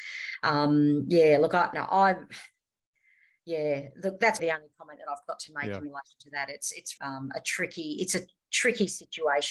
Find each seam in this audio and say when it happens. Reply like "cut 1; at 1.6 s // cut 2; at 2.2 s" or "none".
cut 1; at 1.7 s // cut 2; at 4.4 s // cut 3; at 7.0 s